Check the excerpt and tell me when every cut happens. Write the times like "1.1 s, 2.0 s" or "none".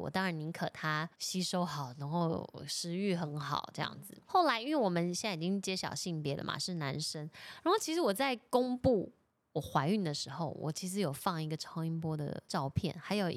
1.1 s, 12.5 s